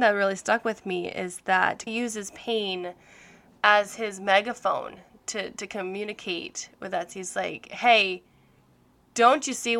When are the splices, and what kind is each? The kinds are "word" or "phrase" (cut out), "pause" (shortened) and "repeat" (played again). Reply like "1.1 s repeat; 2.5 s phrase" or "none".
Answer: 1.9 s word